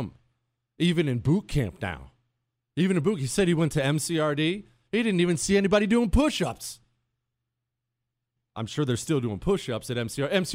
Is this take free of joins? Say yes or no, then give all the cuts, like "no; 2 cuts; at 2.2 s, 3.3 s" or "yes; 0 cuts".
yes; 0 cuts